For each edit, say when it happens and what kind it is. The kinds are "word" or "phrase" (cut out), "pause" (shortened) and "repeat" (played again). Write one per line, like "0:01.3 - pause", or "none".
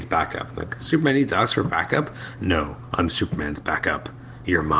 none